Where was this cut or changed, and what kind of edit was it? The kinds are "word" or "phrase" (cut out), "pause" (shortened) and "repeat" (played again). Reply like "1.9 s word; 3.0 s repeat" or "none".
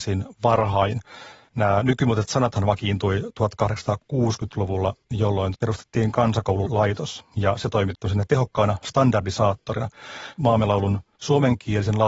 none